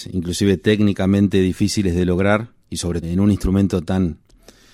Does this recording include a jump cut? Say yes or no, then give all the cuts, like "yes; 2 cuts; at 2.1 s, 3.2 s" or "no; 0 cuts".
yes; 2 cuts; at 2.6 s, 3.0 s